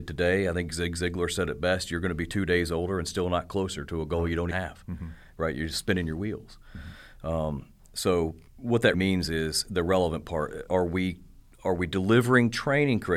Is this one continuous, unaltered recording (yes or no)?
no